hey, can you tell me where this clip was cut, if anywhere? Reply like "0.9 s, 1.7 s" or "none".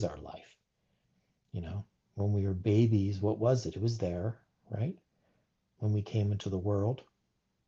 none